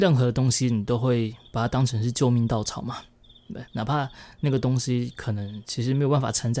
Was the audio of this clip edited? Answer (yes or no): yes